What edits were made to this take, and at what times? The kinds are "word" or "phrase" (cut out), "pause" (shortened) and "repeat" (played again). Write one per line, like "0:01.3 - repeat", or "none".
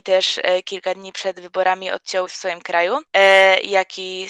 0:02.3 - word